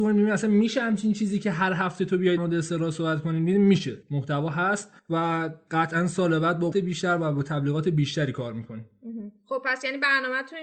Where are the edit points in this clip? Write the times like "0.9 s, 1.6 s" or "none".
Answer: 2.4 s, 4.0 s, 5.0 s, 6.7 s